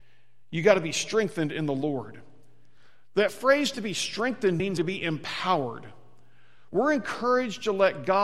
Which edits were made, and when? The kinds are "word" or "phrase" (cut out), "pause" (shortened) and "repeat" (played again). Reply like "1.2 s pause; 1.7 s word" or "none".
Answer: 4.8 s word